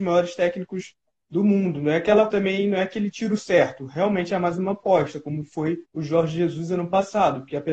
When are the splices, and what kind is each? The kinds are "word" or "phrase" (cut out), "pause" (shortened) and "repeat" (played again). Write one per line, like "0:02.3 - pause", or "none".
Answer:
0:02.3 - word
0:05.9 - pause